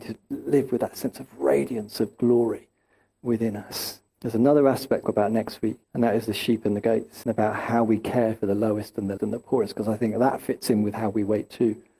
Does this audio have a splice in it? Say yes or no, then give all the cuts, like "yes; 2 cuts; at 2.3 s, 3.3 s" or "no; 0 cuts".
yes; 6 cuts; at 2.1 s, 4.1 s, 5.0 s, 5.8 s, 7.2 s, 9.2 s